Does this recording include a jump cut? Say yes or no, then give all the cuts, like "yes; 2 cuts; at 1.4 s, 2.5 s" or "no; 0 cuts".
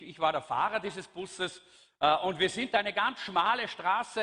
no; 0 cuts